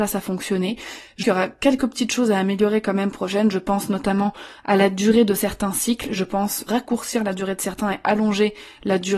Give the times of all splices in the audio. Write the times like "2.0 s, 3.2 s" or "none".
1.2 s, 3.1 s, 6.7 s